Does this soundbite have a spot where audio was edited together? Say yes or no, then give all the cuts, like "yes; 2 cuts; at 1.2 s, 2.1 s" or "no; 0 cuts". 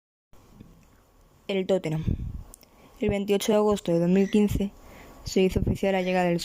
no; 0 cuts